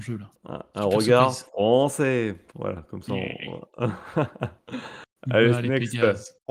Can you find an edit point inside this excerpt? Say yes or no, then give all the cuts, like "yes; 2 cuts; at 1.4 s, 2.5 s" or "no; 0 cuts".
no; 0 cuts